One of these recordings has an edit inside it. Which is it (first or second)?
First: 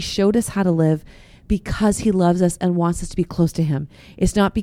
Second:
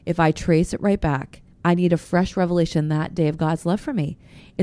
second